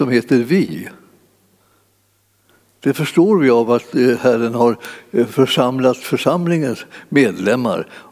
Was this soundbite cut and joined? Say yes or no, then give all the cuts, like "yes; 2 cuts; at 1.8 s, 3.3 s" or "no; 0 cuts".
no; 0 cuts